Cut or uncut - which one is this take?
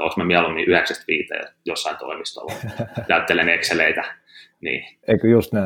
uncut